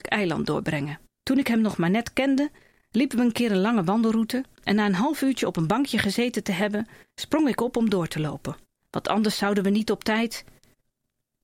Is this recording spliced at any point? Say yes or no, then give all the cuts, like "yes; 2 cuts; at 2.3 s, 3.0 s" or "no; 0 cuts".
no; 0 cuts